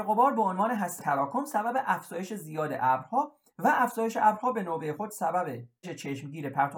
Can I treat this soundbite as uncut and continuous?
no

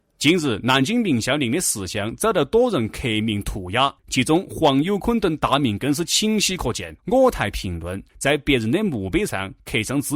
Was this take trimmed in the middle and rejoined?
yes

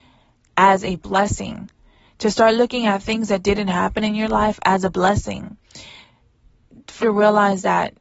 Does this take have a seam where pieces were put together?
yes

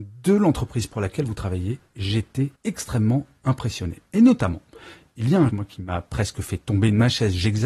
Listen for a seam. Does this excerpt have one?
yes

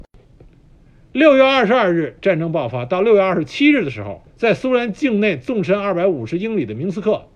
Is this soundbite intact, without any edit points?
no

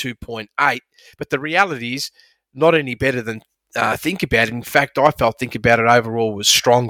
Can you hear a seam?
no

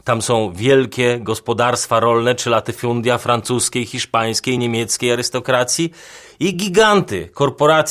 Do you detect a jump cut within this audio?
no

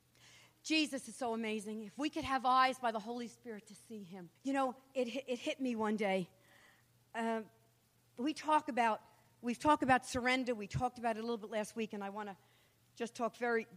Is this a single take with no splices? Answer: no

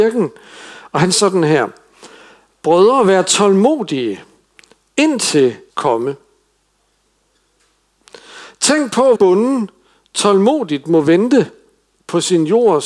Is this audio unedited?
no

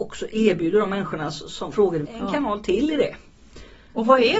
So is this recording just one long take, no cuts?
no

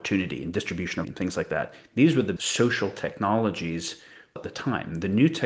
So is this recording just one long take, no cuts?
no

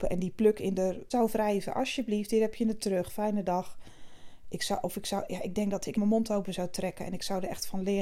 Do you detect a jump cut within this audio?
yes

